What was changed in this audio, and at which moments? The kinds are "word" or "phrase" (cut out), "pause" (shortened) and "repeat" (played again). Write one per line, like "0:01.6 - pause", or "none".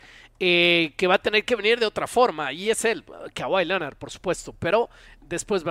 none